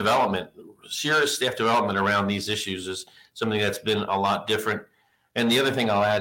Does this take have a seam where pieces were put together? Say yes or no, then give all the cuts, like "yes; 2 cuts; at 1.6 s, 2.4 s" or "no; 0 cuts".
no; 0 cuts